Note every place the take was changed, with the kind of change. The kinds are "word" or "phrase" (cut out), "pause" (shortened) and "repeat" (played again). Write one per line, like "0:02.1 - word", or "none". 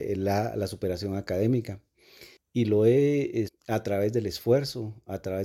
0:02.4 - pause
0:03.5 - word

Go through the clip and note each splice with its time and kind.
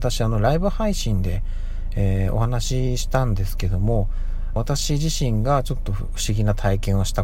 0:04.6 - phrase

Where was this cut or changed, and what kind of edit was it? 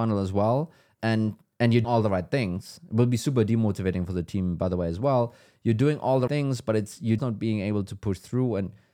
0:01.8 - word
0:06.3 - word
0:07.2 - word

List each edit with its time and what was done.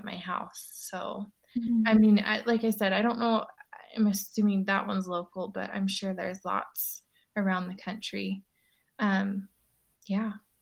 none

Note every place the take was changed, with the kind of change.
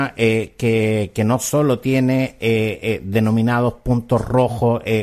none

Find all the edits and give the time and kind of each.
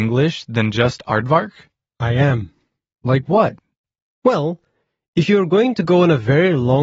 none

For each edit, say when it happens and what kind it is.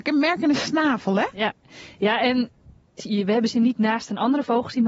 0:03.0 - word

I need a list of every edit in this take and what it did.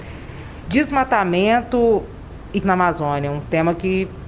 0:02.6 - word

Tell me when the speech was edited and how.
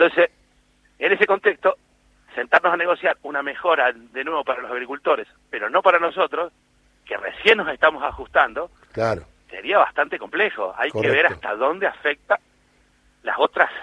none

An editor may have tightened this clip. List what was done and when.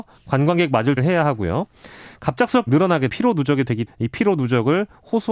0:01.0 - word
0:02.7 - word
0:03.1 - word
0:03.9 - word

